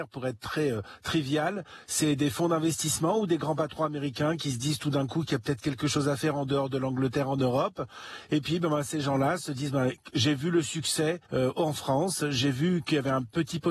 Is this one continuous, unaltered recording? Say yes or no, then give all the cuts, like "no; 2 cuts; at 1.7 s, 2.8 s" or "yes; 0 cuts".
no; 1 cut; at 11.2 s